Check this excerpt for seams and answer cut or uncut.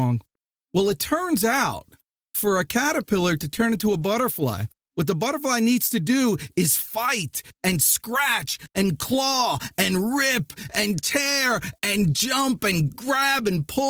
uncut